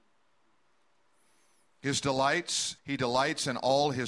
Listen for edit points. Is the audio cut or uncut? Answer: cut